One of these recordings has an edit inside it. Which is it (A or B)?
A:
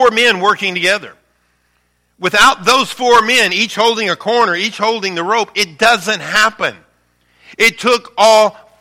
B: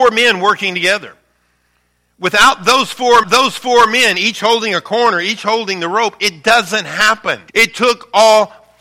B